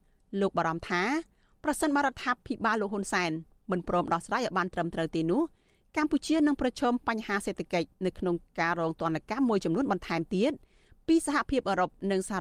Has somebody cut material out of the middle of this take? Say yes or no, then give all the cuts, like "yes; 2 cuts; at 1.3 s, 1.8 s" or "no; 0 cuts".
yes; 1 cut; at 7.9 s